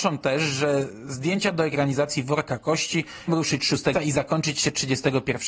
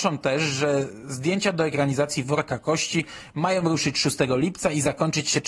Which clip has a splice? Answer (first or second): first